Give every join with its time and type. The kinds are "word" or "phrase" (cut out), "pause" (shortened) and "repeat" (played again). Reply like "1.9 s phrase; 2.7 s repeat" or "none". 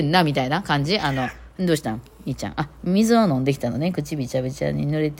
none